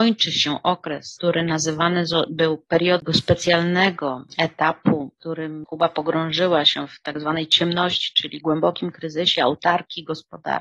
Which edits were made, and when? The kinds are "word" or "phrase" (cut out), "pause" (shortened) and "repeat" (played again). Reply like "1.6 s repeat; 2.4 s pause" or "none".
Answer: 3.0 s word